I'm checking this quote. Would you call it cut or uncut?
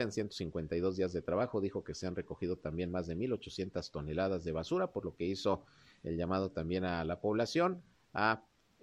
uncut